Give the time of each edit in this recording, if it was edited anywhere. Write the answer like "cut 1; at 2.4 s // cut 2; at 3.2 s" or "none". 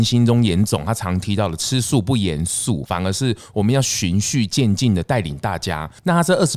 cut 1; at 2.8 s